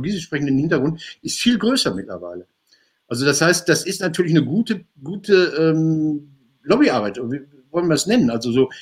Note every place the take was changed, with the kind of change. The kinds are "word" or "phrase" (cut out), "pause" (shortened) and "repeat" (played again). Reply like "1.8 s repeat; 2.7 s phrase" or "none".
4.9 s pause